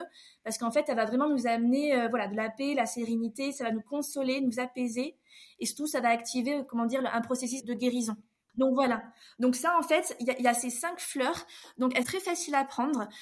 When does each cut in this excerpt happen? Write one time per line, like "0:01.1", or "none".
0:07.6
0:12.0